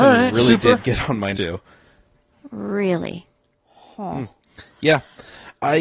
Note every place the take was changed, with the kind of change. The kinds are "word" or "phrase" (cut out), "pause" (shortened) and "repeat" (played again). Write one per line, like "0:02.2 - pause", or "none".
0:01.3 - word
0:03.5 - pause

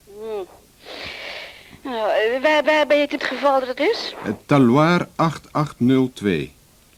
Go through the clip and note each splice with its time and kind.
0:02.6 - repeat
0:03.2 - phrase
0:03.8 - word

